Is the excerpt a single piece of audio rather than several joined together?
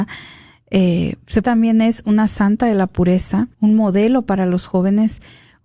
no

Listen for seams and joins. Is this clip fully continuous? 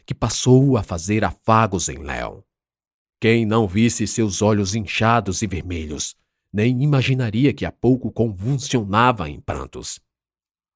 yes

